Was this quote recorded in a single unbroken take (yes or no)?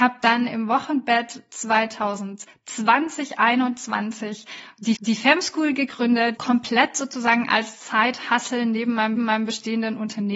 no